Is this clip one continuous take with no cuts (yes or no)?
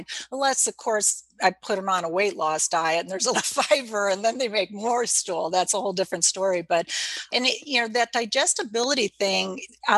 no